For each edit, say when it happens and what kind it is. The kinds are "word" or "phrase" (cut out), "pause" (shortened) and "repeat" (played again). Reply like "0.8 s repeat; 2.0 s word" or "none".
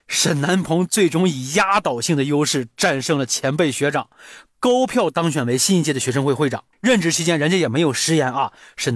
6.7 s pause